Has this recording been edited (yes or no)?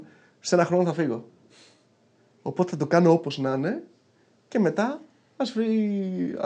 no